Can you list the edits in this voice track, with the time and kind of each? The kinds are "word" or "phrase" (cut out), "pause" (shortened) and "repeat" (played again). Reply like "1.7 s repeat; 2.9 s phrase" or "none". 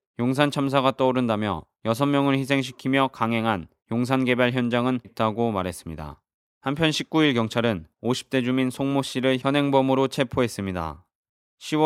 1.7 s pause; 5.0 s phrase; 7.9 s phrase